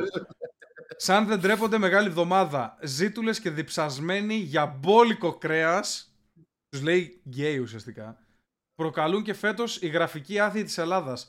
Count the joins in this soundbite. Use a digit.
0